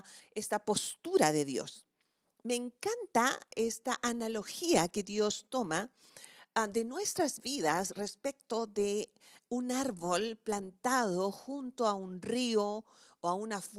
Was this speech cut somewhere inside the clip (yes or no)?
no